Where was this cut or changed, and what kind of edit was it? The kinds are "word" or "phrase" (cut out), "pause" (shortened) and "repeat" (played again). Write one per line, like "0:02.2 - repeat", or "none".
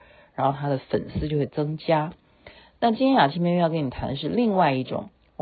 none